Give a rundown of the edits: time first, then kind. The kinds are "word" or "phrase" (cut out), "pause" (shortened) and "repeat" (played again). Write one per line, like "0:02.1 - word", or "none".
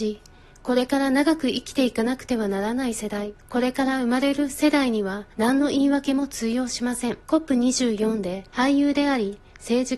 0:03.4 - pause
0:05.3 - pause
0:07.2 - pause
0:08.5 - pause